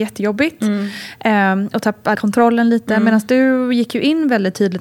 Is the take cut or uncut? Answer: cut